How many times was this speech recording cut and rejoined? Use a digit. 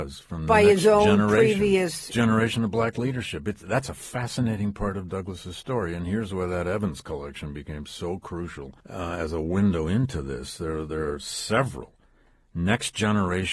2